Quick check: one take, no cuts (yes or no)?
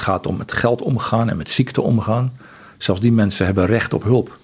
yes